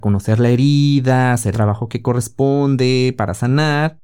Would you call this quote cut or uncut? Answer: cut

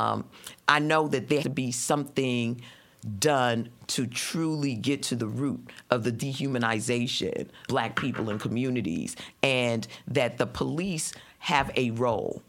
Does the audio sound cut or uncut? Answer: cut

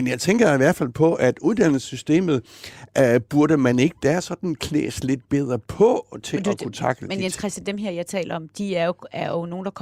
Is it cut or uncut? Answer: uncut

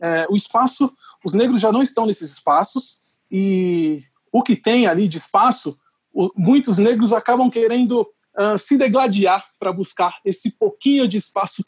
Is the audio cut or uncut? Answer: uncut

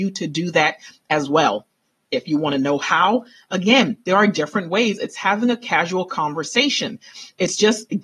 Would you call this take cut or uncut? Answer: uncut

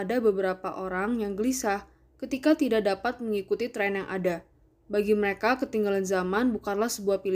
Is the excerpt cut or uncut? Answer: uncut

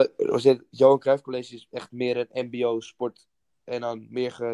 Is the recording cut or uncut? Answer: uncut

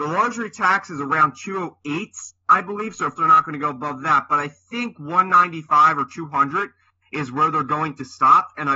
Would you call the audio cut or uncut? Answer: cut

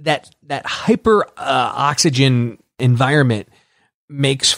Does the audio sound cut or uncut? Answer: uncut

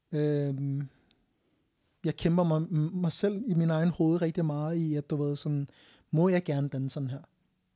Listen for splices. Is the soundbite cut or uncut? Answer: uncut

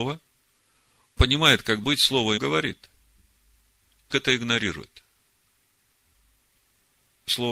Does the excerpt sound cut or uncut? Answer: cut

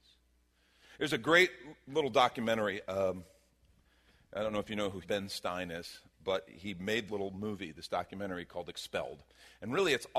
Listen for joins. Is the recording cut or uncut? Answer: cut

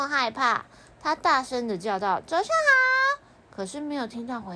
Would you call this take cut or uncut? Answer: uncut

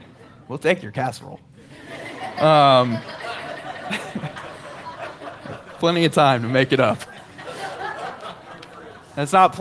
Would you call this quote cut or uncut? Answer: uncut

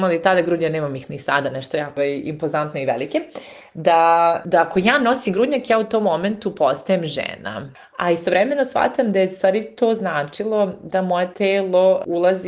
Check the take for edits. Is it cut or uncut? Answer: uncut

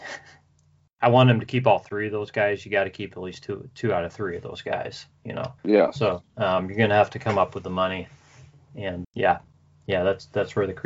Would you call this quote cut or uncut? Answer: cut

